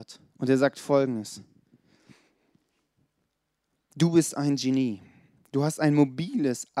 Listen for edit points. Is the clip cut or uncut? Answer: uncut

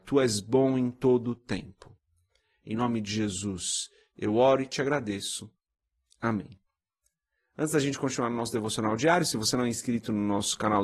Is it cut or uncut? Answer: uncut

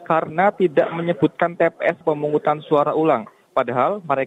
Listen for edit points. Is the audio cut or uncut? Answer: cut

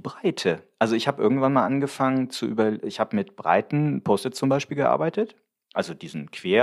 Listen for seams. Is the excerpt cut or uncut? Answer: uncut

